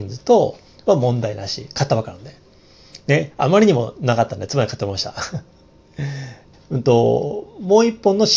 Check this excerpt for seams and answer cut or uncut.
cut